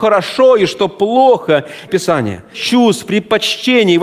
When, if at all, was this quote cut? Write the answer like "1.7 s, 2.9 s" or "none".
1.9 s, 2.5 s